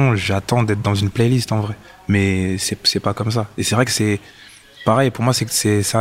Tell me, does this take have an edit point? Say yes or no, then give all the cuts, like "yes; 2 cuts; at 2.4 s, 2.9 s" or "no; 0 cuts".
no; 0 cuts